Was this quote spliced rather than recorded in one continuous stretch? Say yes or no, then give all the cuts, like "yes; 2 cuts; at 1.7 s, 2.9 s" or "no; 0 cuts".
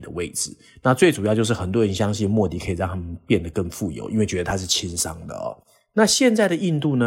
no; 0 cuts